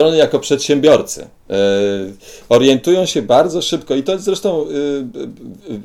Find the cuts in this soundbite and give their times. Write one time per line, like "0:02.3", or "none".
none